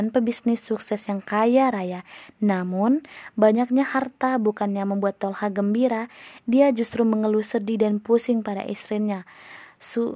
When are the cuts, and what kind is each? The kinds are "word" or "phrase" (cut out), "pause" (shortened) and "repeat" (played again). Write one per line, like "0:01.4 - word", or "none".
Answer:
none